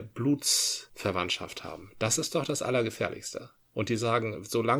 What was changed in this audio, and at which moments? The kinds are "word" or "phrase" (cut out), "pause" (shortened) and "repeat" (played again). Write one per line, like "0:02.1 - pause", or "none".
none